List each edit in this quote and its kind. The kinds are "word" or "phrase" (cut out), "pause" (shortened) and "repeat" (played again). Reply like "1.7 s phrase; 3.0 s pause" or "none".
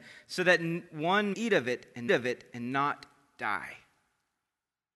1.3 s word; 2.1 s repeat